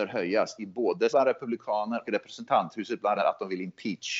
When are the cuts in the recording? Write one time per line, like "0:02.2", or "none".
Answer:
0:01.1
0:02.0
0:03.2